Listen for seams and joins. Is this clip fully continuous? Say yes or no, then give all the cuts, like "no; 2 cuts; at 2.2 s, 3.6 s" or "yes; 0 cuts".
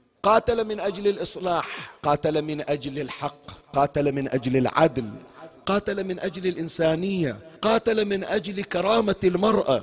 no; 3 cuts; at 2.0 s, 3.6 s, 7.6 s